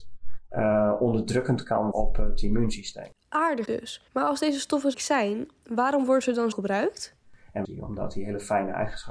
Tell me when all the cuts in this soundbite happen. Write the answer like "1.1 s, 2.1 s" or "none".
1.9 s, 3.7 s, 4.1 s, 4.9 s, 6.5 s, 7.6 s